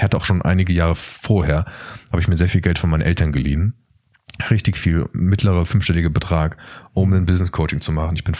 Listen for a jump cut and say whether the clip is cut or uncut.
uncut